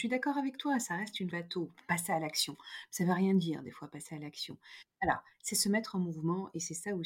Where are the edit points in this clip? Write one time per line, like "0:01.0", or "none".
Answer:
0:01.3